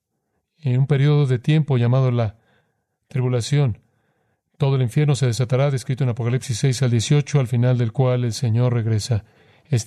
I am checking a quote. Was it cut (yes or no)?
no